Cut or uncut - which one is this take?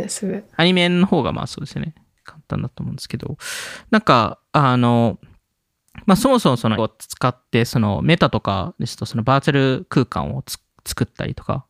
cut